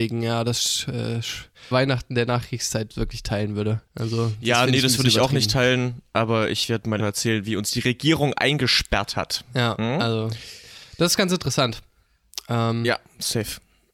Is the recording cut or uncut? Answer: cut